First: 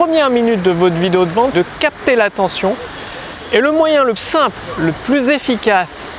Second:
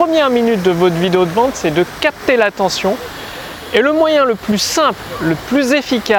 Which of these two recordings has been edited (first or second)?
first